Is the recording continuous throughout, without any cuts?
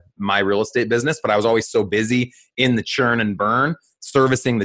yes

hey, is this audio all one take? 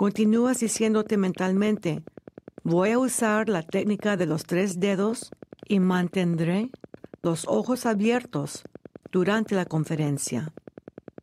yes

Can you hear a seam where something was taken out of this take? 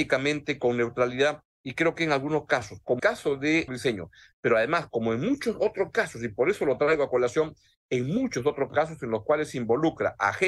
yes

